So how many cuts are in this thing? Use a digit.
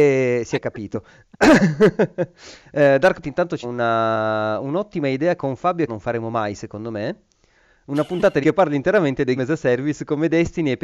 6